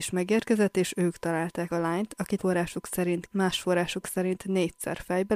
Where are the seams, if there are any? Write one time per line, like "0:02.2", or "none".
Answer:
0:01.7
0:02.4
0:03.3